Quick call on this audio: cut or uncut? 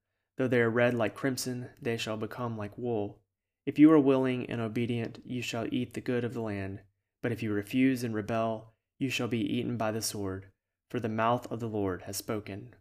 uncut